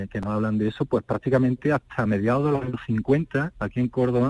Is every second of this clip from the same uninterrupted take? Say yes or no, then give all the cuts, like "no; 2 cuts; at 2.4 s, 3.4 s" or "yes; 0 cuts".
yes; 0 cuts